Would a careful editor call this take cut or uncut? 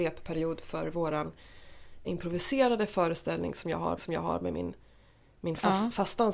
cut